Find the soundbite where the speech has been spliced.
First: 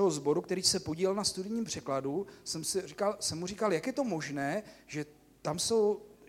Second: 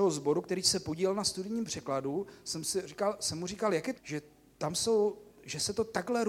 second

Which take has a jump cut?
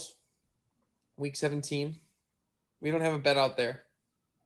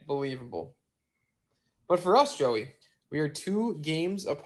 second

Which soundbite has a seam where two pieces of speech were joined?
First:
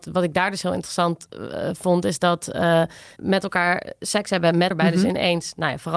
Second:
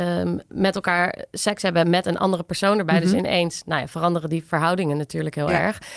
first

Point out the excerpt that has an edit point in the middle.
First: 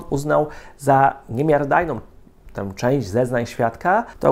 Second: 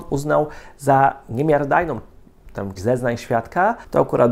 second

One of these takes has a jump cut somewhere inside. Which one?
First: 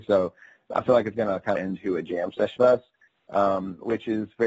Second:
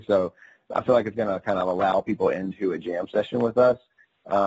first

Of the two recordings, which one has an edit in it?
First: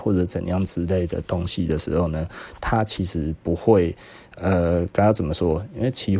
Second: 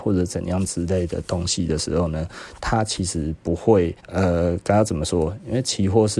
second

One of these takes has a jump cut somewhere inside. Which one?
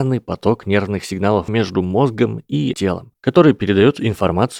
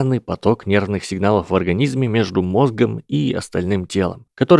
first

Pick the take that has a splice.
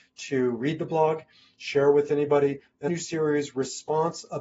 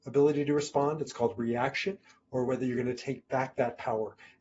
first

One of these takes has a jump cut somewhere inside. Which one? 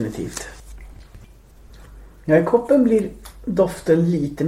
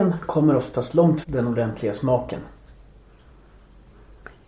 second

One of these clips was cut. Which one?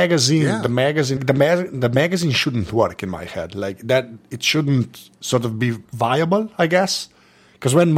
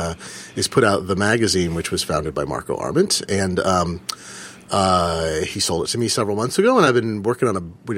first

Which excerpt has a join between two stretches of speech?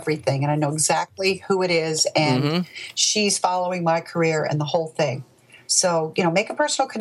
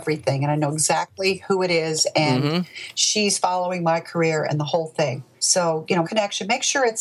second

